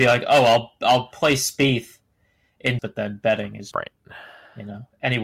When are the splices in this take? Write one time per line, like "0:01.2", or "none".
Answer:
0:02.8
0:03.7